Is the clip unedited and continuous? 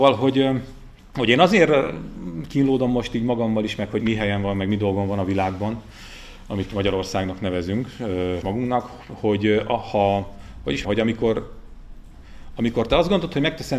no; 3 cuts; at 4.0 s, 8.4 s, 10.8 s

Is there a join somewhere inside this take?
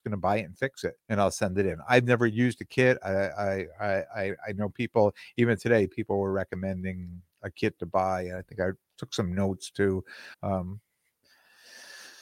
yes; 3 cuts; at 1.0 s, 8.8 s, 10.3 s

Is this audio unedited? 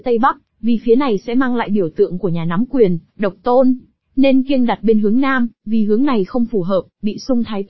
yes; 0 cuts

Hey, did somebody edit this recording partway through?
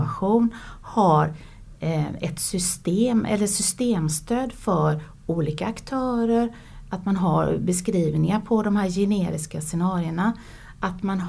no; 0 cuts

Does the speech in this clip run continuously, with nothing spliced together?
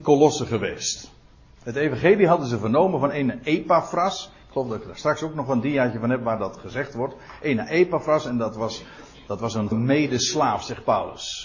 no; 1 cut; at 9.7 s

